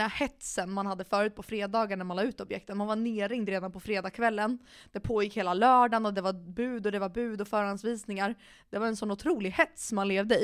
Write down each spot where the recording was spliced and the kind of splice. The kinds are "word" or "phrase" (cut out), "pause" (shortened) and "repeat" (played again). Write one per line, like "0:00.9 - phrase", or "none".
none